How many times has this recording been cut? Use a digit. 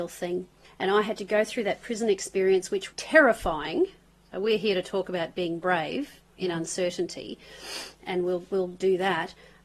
1